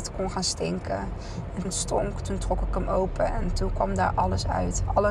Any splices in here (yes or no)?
yes